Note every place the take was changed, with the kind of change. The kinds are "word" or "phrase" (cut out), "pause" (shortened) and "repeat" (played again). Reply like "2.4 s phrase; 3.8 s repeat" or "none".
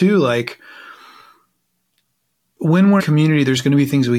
3.0 s word